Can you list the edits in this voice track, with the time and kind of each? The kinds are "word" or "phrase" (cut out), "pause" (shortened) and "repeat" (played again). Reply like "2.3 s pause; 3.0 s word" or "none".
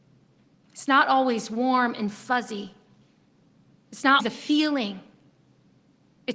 4.2 s word